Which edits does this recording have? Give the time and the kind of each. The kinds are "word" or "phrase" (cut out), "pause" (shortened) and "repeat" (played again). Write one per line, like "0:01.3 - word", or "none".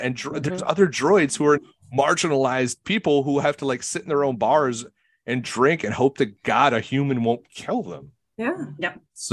0:01.6 - word